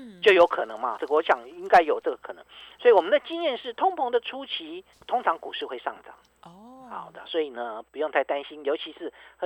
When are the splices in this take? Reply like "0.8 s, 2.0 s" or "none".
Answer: 1.0 s, 4.9 s